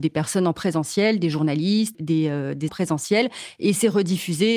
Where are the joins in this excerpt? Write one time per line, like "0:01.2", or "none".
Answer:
0:01.9
0:02.7